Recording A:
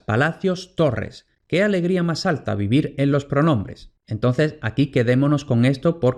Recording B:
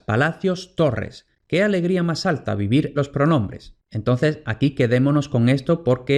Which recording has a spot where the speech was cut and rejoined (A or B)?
B